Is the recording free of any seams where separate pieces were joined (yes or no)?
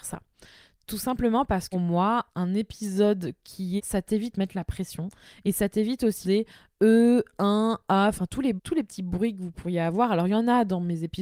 no